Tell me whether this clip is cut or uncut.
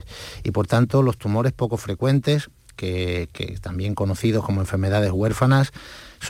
uncut